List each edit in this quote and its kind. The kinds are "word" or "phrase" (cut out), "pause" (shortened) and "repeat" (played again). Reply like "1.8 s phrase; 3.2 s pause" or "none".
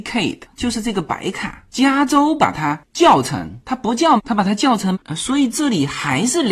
4.2 s word; 4.9 s word